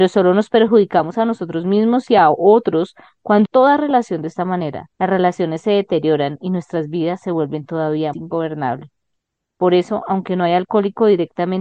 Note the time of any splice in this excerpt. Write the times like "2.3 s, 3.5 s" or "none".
3.4 s, 4.9 s, 8.1 s